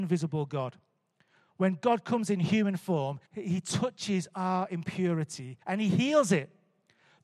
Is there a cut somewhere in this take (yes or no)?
yes